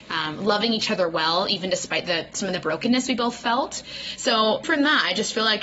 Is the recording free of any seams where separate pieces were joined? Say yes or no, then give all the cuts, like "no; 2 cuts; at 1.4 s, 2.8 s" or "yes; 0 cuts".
no; 1 cut; at 4.6 s